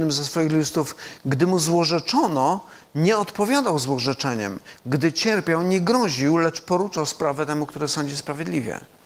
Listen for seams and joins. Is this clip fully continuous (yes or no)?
yes